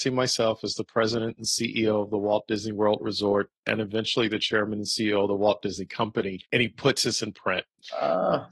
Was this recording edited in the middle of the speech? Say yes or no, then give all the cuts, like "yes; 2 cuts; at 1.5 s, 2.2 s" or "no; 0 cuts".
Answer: yes; 1 cut; at 6.4 s